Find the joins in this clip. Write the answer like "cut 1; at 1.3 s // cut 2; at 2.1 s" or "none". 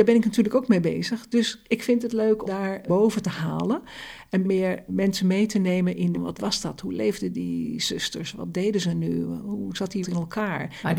cut 1; at 2.4 s // cut 2; at 2.9 s // cut 3; at 4.9 s // cut 4; at 6.1 s // cut 5; at 10.0 s